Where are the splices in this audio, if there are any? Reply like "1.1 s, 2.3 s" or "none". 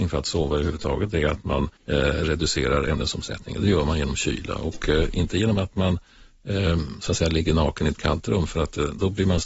1.8 s